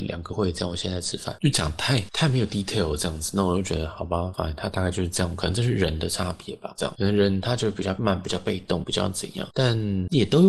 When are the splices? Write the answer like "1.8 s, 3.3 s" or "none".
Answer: none